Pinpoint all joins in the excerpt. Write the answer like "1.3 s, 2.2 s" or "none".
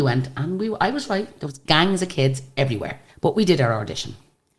3.1 s